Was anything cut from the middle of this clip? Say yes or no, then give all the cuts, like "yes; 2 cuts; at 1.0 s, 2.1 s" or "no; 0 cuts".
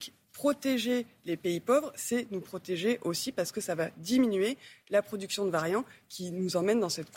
no; 0 cuts